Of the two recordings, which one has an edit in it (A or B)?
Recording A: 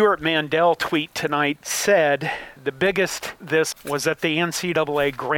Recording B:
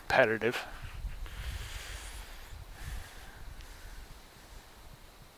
A